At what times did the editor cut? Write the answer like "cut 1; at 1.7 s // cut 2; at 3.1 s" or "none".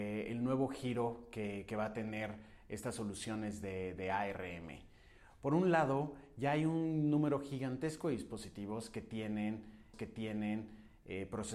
cut 1; at 9.9 s